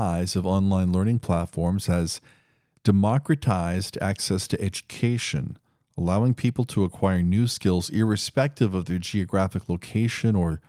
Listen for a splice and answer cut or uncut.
uncut